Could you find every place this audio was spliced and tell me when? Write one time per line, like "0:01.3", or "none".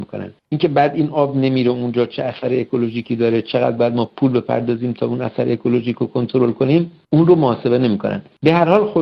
none